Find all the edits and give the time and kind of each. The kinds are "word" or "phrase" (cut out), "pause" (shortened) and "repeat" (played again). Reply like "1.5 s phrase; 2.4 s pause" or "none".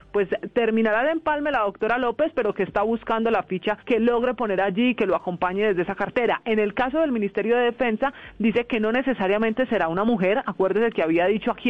3.8 s pause